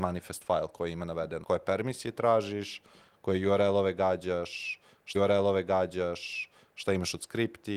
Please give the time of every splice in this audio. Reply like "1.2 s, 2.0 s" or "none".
1.4 s, 5.1 s